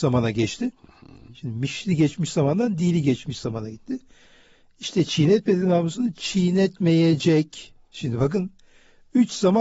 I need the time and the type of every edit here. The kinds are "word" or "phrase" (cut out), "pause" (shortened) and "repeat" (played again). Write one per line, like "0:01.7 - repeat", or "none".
none